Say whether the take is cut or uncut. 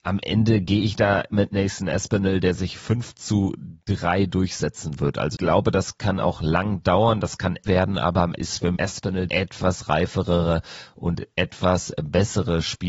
cut